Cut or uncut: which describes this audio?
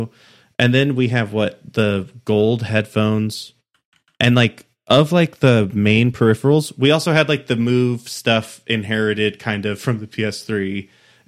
uncut